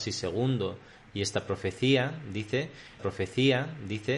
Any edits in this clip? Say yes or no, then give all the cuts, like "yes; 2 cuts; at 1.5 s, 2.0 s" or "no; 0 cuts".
yes; 1 cut; at 3.0 s